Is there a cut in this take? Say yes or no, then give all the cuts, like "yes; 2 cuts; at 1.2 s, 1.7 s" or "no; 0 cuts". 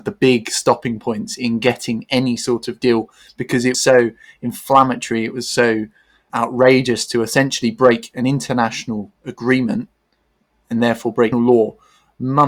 yes; 3 cuts; at 3.7 s, 6.3 s, 11.3 s